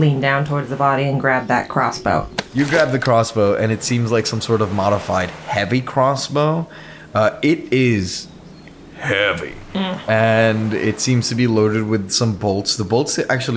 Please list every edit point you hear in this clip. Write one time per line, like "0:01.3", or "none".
none